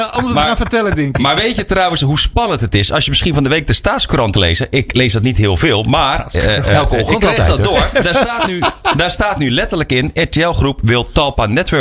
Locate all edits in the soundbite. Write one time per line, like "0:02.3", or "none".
0:04.3